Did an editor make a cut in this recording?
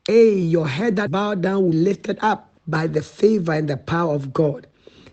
yes; 3 cuts; at 1.1 s, 1.7 s, 2.6 s

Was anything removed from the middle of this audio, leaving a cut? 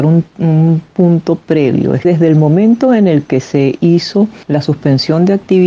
yes; 2 cuts; at 2.0 s, 4.4 s

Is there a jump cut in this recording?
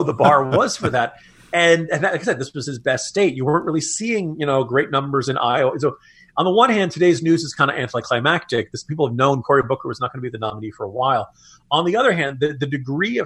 no; 0 cuts

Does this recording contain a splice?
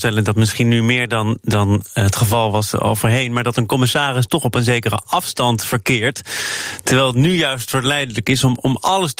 no; 0 cuts

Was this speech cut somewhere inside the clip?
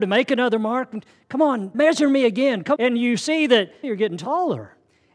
yes; 3 cuts; at 1.7 s, 2.8 s, 3.8 s

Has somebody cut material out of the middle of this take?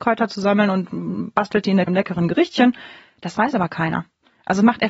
yes; 1 cut; at 1.9 s

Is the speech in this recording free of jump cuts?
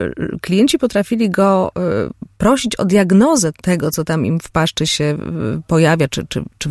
yes; 0 cuts

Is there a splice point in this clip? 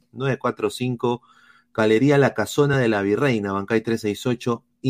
no; 0 cuts

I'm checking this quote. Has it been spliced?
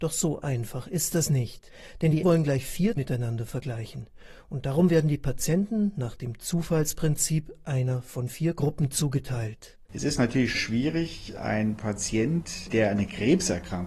yes; 3 cuts; at 2.2 s, 3.0 s, 10.5 s

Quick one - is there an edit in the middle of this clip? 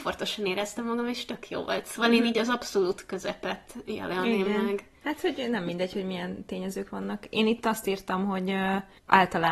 no; 0 cuts

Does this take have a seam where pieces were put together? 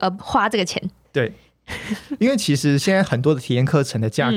no; 0 cuts

